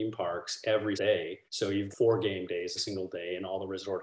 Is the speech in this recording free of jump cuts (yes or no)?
no